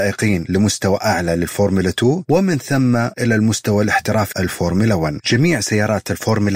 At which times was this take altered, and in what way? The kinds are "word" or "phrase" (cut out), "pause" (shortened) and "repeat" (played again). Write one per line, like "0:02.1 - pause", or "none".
0:04.3 - word